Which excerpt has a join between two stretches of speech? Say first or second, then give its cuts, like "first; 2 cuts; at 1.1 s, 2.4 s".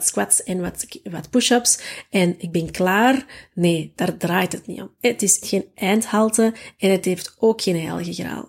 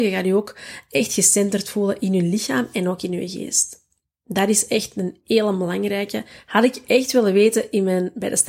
first; 1 cut; at 5.4 s